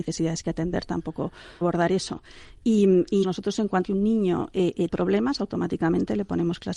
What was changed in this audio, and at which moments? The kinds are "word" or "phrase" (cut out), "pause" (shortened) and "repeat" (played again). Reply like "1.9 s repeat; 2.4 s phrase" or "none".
1.6 s word; 3.2 s word; 3.8 s word; 4.9 s word